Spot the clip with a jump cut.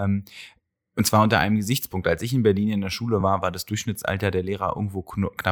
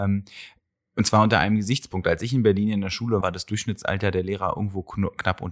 second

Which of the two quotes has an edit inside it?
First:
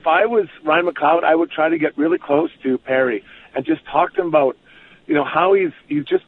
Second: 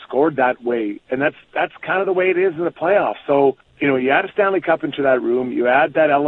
second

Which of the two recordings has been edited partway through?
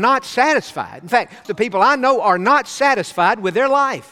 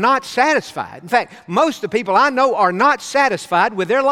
first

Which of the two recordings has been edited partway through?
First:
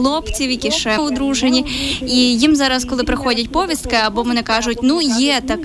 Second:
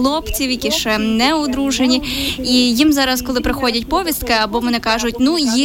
first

